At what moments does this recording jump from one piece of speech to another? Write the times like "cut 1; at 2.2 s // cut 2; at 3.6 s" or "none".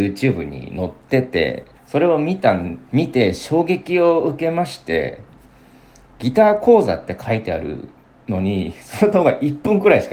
cut 1; at 1.7 s